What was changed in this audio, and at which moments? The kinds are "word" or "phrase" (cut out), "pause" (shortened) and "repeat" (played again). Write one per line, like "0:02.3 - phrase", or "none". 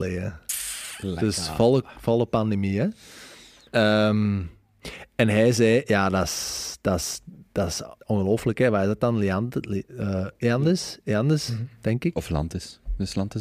0:08.0 - pause